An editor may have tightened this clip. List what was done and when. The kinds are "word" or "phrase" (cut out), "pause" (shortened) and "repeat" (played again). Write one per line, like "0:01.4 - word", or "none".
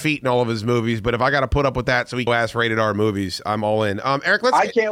0:02.3 - phrase